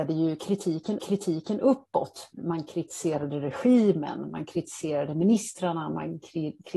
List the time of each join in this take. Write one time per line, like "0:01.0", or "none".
0:01.0